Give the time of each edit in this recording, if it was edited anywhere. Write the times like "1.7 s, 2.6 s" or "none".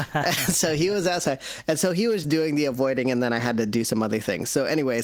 2.2 s

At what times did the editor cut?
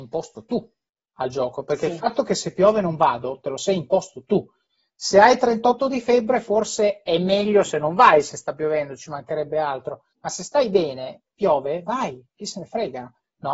10.1 s

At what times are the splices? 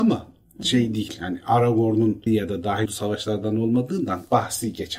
2.3 s, 2.9 s

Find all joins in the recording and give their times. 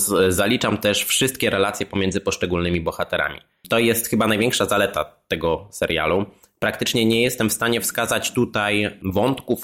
none

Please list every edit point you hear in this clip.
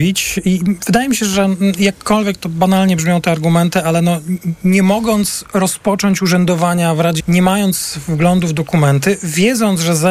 7.2 s

